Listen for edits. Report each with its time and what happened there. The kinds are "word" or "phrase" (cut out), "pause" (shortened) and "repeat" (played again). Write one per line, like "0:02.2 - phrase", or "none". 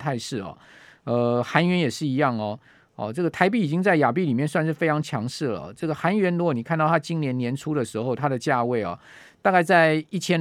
none